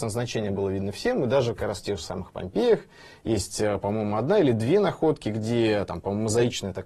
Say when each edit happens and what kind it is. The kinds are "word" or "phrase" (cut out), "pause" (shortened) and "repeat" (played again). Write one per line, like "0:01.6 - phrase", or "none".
none